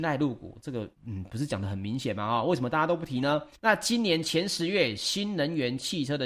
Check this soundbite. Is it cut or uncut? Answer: cut